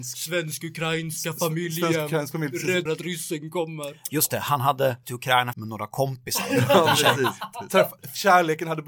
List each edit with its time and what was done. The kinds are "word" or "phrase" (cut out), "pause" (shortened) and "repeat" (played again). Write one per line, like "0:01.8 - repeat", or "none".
0:02.9 - word
0:05.0 - word
0:05.5 - phrase